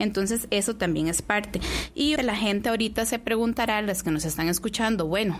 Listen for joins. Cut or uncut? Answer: cut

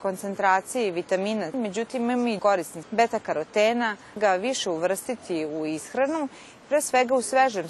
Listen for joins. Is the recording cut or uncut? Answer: cut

